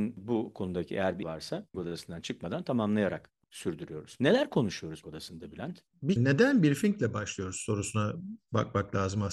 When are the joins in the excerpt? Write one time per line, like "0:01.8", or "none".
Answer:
0:01.2
0:01.7
0:03.4
0:05.0
0:06.2